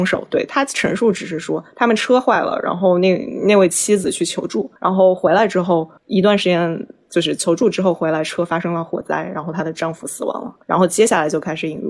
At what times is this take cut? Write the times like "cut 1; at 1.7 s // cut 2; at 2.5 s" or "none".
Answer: cut 1; at 4.8 s // cut 2; at 6.0 s // cut 3; at 10.6 s

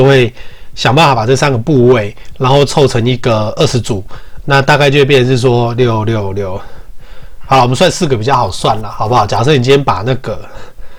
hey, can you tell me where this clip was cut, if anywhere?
cut 1; at 4.4 s

